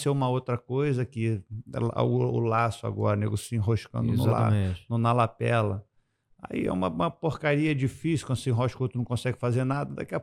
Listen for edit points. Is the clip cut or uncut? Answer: uncut